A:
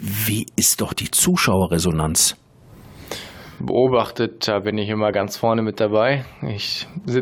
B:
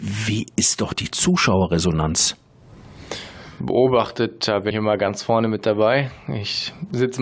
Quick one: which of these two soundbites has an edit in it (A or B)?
B